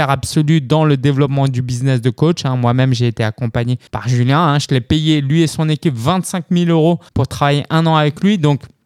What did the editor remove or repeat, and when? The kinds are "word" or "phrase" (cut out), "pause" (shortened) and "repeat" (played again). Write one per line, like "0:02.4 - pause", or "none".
0:03.9 - pause
0:07.1 - pause